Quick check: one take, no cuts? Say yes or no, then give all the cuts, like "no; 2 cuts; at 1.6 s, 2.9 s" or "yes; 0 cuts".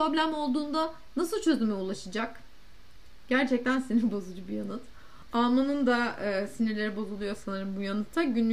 yes; 0 cuts